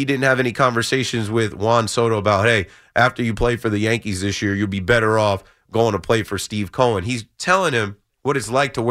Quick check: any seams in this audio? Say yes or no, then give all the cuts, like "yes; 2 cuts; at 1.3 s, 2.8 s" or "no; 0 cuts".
no; 0 cuts